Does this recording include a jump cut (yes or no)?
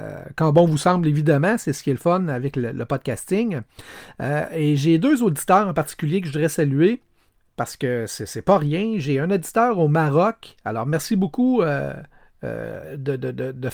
no